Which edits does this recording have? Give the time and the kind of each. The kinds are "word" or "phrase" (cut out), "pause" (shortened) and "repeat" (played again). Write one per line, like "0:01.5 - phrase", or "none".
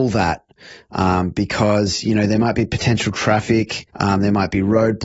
0:03.9 - pause